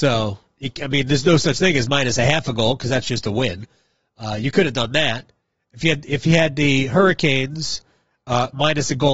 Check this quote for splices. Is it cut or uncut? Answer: uncut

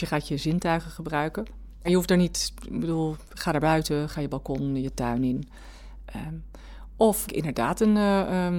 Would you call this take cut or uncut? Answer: cut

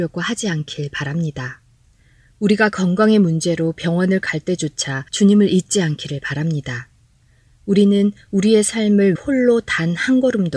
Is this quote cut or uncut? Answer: cut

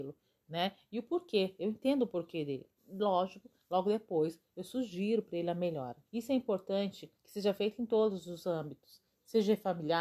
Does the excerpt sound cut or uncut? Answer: cut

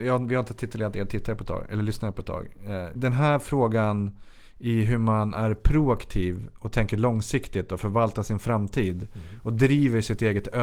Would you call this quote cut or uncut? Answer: cut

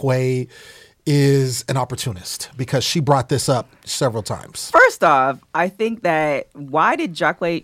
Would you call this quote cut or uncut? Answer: uncut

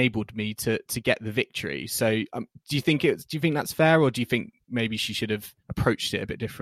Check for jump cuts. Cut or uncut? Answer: cut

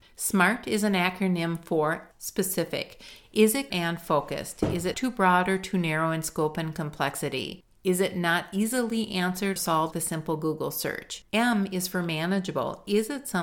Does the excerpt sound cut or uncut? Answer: cut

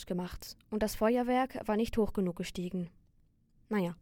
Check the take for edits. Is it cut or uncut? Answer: uncut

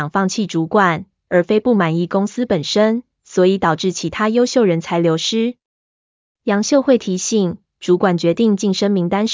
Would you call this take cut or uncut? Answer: uncut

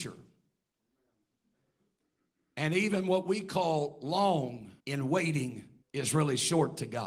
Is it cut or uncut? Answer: cut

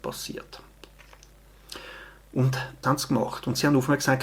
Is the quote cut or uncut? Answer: cut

